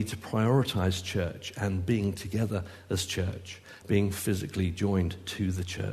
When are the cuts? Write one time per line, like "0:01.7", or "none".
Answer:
0:03.8